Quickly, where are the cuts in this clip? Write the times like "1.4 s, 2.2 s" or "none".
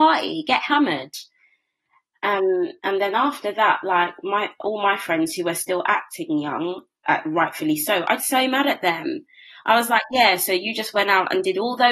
8.2 s